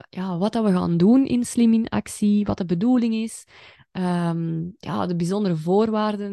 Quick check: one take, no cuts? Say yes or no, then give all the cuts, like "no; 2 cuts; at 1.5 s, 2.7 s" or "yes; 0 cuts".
yes; 0 cuts